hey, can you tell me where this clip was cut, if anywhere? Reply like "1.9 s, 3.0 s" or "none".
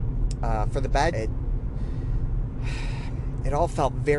1.1 s